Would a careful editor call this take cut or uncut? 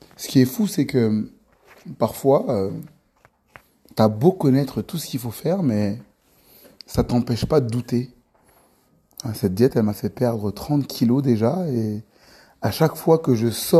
uncut